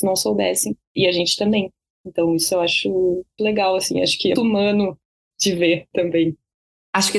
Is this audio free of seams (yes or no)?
no